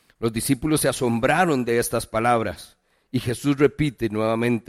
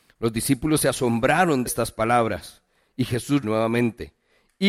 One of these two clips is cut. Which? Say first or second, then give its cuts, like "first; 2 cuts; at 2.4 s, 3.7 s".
second; 2 cuts; at 1.7 s, 3.4 s